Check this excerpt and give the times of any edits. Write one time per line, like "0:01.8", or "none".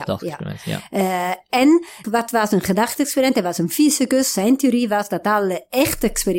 0:02.0